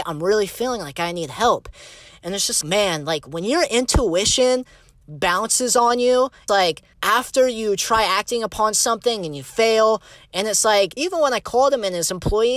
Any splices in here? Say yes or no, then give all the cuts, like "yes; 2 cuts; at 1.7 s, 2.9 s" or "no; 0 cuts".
yes; 3 cuts; at 2.6 s, 6.5 s, 11.0 s